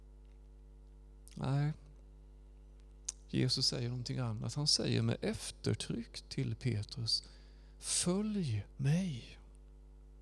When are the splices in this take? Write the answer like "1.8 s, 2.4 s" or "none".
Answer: 8.7 s